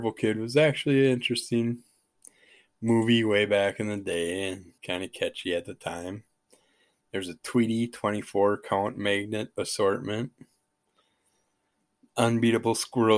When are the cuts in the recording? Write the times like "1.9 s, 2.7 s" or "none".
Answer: 4.8 s